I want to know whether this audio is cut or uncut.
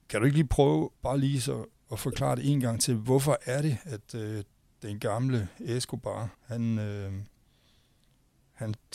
cut